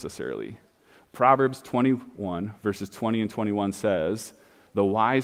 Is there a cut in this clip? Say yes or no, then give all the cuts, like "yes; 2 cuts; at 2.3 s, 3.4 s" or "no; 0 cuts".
no; 0 cuts